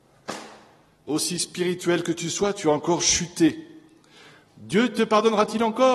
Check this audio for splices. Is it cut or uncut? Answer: uncut